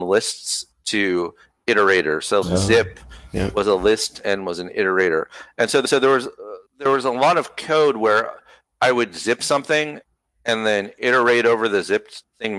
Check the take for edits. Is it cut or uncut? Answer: cut